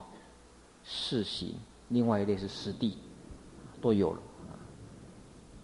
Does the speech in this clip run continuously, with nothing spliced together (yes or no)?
yes